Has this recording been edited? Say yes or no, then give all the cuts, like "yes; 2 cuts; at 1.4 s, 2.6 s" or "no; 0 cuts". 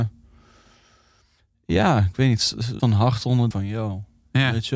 yes; 2 cuts; at 2.8 s, 3.5 s